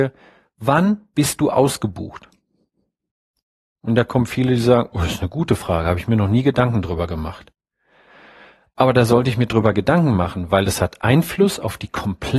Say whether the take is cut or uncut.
uncut